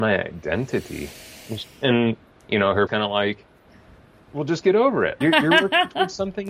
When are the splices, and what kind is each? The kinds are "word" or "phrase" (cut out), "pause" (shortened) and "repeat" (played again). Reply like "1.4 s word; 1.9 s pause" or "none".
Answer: 2.9 s word; 5.2 s word